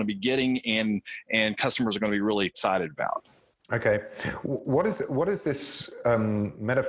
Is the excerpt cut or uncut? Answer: uncut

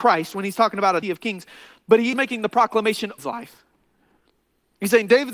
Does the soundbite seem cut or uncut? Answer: cut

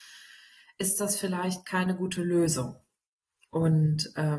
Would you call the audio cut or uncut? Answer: uncut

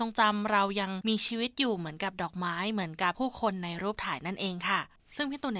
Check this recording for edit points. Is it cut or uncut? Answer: uncut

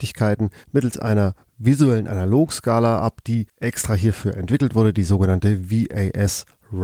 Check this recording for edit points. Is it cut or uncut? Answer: cut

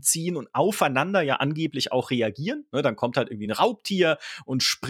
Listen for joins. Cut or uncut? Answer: uncut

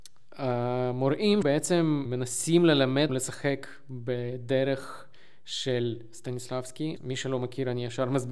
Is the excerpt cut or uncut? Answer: cut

